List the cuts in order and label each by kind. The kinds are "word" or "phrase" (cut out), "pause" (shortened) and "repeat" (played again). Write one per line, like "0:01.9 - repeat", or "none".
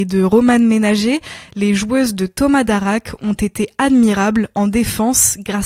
none